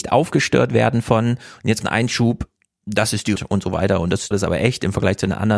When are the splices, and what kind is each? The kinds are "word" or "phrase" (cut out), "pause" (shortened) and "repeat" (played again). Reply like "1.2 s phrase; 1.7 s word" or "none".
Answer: 1.8 s word; 3.4 s word; 4.3 s word

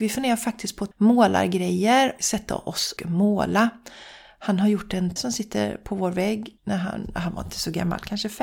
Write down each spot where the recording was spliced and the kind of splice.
0.9 s phrase; 2.2 s word; 3.0 s word; 5.2 s word; 6.6 s pause

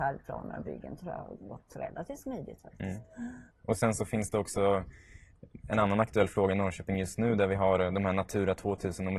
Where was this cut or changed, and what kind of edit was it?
3.5 s pause

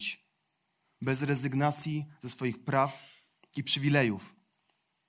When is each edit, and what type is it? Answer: none

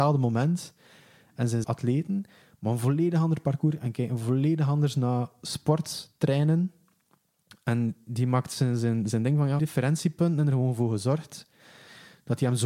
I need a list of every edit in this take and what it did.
1.6 s phrase; 9.6 s phrase

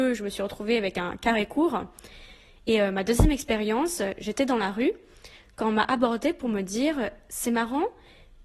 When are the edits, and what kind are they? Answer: none

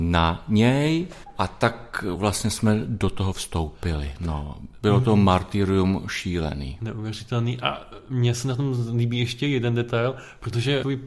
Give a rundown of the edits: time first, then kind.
none

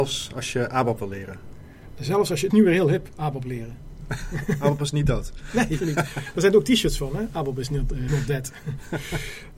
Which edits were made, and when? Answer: 2.5 s word; 5.8 s word; 8.1 s word

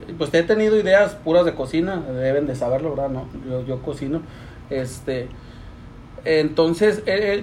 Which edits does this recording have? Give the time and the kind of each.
none

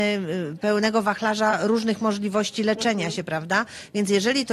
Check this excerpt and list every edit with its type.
none

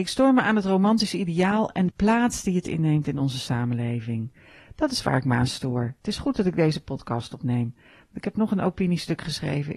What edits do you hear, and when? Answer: 1.9 s word

